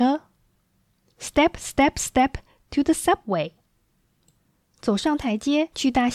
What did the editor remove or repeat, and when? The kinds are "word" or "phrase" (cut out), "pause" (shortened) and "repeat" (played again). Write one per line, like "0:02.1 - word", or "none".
none